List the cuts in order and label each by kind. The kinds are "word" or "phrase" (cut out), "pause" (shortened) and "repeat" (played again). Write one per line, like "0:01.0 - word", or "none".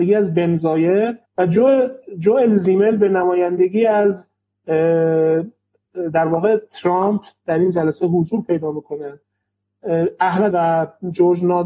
0:01.3 - pause
0:10.5 - word